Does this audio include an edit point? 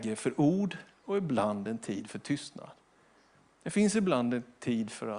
no; 0 cuts

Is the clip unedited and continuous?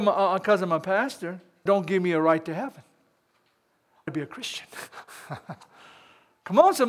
no; 2 cuts; at 1.7 s, 4.1 s

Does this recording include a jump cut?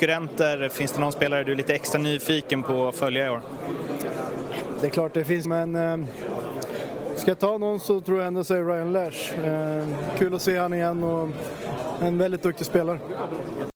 yes; 1 cut; at 5.4 s

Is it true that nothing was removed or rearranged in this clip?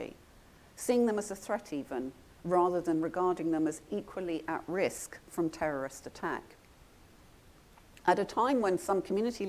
yes; 0 cuts

